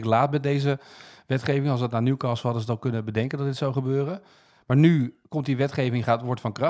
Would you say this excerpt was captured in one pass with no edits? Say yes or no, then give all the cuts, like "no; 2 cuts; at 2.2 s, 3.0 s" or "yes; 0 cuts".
yes; 0 cuts